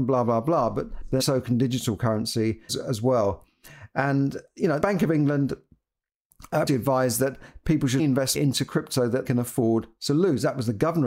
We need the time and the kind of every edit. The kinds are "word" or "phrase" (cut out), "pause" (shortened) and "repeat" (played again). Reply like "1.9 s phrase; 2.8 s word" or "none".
1.2 s word; 2.7 s word; 4.8 s word; 6.7 s word; 8.0 s word; 8.3 s word; 9.2 s word

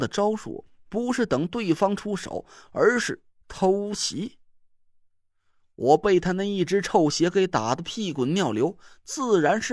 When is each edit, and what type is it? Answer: none

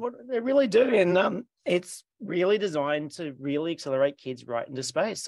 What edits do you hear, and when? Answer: none

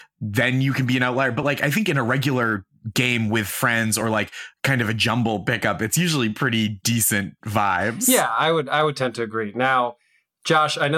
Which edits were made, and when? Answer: none

